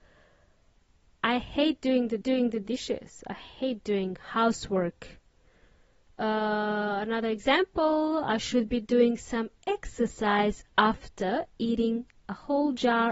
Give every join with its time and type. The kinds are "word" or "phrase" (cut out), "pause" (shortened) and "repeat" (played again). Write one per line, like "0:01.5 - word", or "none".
0:02.2 - repeat